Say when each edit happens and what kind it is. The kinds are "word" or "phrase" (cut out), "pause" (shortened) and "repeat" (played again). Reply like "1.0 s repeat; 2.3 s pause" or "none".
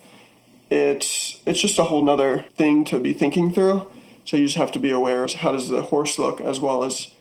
2.5 s pause; 5.3 s phrase